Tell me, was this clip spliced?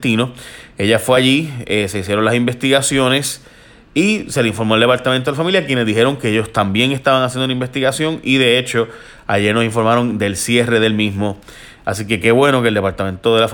no; 0 cuts

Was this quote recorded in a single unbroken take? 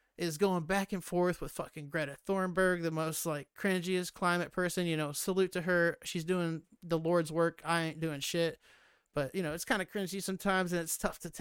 yes; 0 cuts

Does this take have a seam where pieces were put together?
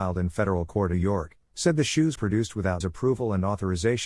yes; 3 cuts; at 0.9 s, 2.2 s, 2.8 s

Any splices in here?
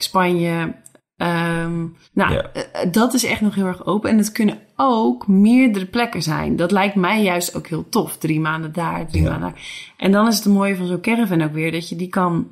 yes; 1 cut; at 2.0 s

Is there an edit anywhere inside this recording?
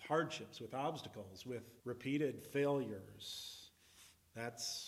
yes; 1 cut; at 1.8 s

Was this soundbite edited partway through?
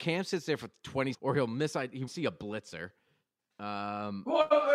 yes; 2 cuts; at 1.1 s, 2.1 s

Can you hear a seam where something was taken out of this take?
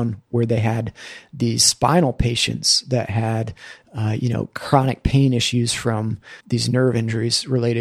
yes; 1 cut; at 6.4 s

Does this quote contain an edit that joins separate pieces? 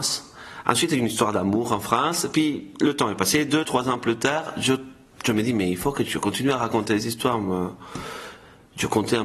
yes; 1 cut; at 6.0 s

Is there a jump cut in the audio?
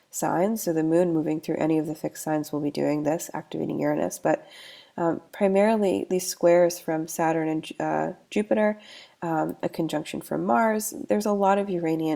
no; 0 cuts

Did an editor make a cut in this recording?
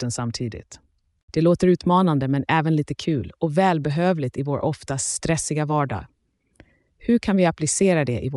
no; 0 cuts

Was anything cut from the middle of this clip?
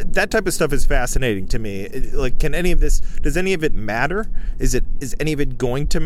no; 0 cuts

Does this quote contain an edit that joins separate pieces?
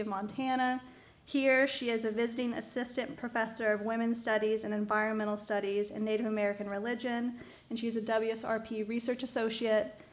no; 0 cuts

